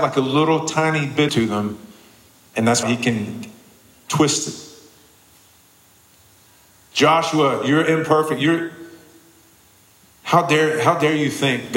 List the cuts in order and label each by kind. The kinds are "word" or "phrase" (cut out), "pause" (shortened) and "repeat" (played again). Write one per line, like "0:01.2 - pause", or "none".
0:01.3 - phrase
0:02.3 - pause
0:02.8 - word